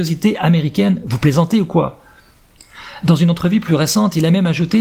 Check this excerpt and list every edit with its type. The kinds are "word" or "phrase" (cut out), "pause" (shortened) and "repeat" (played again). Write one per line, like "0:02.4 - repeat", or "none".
none